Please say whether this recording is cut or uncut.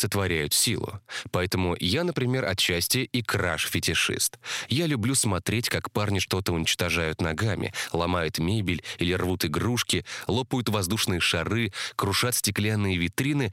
uncut